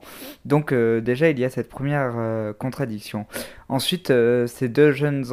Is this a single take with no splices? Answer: yes; 0 cuts

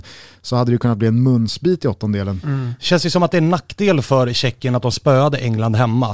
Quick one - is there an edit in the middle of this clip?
no; 0 cuts

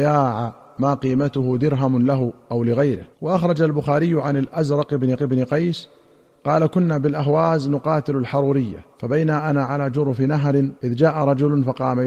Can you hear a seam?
yes; 4 cuts; at 3.1 s, 5.2 s, 8.9 s, 10.8 s

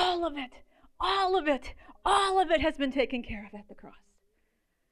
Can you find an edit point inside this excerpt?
no; 0 cuts

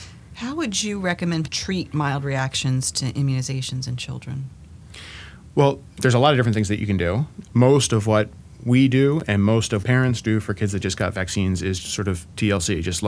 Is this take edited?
yes; 3 cuts; at 1.5 s, 9.8 s, 11.8 s

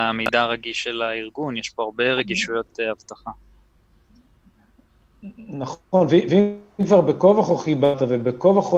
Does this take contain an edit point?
no; 0 cuts

